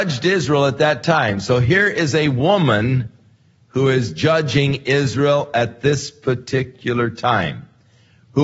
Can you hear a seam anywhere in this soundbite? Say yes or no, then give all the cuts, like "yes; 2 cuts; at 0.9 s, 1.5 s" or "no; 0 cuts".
no; 0 cuts